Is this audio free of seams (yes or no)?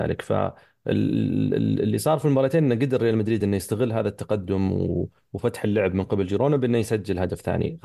yes